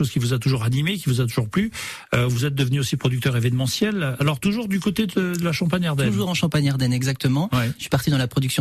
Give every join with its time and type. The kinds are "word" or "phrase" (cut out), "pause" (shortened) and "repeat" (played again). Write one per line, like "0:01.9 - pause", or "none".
none